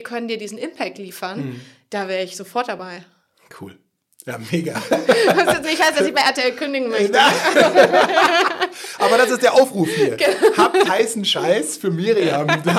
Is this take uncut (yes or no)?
no